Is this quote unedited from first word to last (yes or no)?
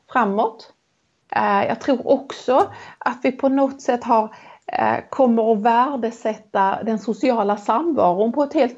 yes